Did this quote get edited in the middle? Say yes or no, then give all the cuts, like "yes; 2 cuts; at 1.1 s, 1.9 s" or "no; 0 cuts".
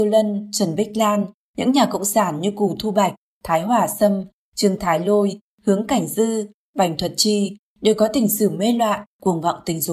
no; 0 cuts